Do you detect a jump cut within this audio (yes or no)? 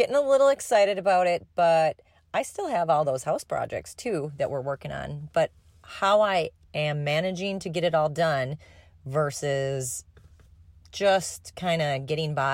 no